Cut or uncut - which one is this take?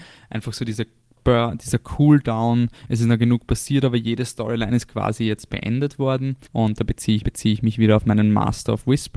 cut